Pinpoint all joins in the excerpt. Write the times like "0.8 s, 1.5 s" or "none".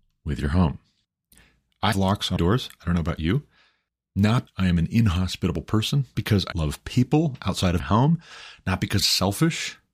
1.9 s, 2.4 s, 4.5 s, 6.1 s, 6.5 s, 7.8 s, 9.0 s